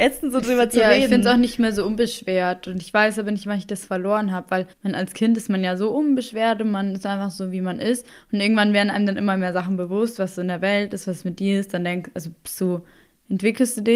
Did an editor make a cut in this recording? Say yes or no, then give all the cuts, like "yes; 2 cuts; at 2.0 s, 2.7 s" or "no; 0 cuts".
yes; 1 cut; at 4.7 s